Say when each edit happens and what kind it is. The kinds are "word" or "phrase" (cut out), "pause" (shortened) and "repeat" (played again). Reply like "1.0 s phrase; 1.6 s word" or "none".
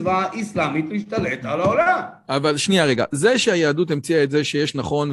none